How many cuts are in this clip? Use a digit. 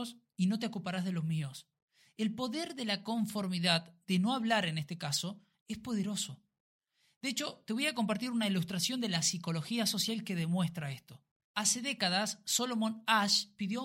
0